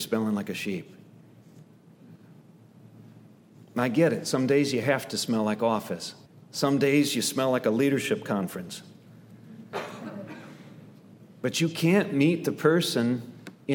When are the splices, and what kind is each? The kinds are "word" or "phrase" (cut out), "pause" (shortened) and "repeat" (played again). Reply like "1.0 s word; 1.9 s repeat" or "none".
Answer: 6.3 s pause